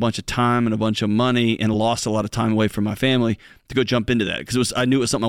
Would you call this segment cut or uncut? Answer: uncut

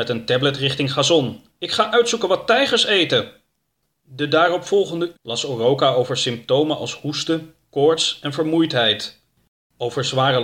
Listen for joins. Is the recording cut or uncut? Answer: cut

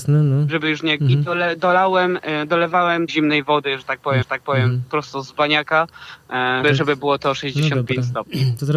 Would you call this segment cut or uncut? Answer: cut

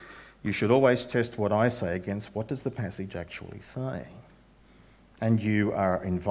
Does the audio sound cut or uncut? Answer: uncut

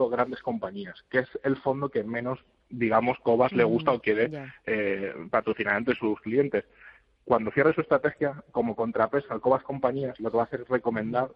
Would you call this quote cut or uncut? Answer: uncut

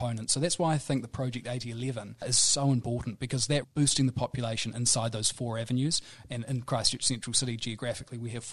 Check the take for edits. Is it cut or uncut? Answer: cut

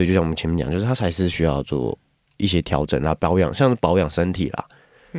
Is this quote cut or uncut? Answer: uncut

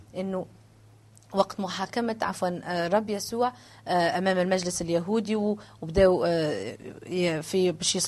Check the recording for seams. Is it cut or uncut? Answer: uncut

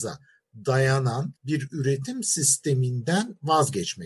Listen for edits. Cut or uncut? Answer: cut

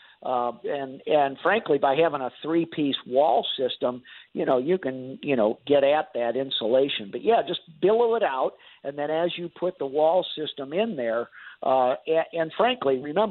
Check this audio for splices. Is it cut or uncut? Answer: uncut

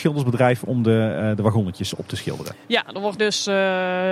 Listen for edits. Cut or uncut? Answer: cut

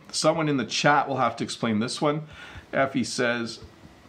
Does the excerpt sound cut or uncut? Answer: uncut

